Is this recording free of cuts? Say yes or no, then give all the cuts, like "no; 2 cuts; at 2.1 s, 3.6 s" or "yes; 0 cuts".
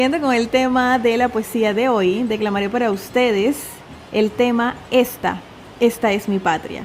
yes; 0 cuts